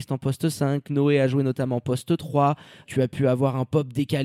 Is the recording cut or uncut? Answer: uncut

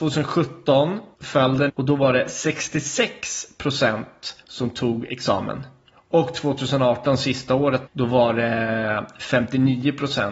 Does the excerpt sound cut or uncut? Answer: cut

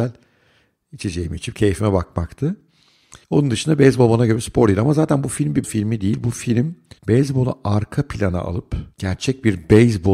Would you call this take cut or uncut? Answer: cut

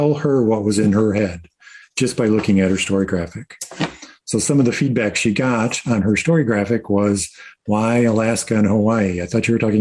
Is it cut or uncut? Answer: uncut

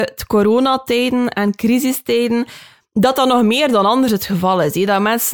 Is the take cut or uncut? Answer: uncut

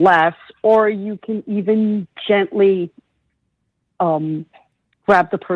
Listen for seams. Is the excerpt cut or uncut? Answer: uncut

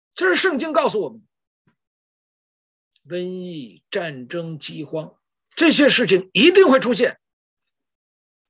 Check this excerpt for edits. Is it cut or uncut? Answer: uncut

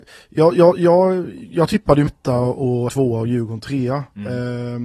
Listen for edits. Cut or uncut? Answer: cut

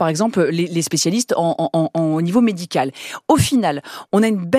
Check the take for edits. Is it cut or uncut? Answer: uncut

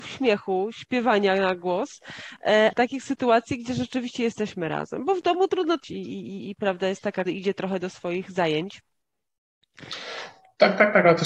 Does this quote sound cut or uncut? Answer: cut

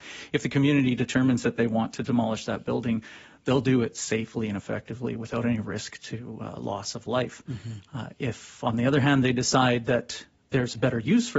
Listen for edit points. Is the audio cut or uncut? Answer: uncut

